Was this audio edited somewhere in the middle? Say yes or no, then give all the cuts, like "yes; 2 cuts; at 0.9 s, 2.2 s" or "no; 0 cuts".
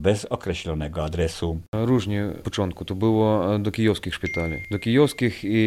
yes; 1 cut; at 2.4 s